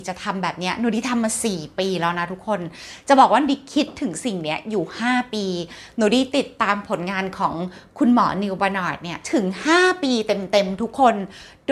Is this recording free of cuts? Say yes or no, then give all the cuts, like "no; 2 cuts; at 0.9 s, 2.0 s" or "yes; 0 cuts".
no; 1 cut; at 9.2 s